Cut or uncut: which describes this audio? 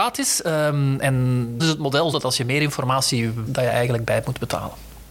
cut